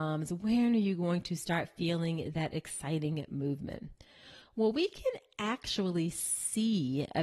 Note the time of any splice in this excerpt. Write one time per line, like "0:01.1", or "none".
none